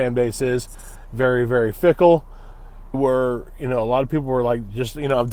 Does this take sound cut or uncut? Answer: cut